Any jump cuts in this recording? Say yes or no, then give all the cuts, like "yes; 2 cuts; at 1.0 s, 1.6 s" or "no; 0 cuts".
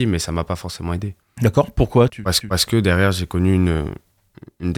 yes; 3 cuts; at 1.2 s, 2.1 s, 2.4 s